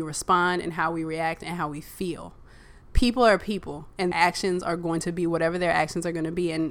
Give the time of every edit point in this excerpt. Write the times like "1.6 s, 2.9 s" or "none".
2.8 s, 4.1 s